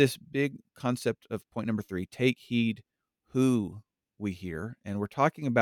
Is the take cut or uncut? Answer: uncut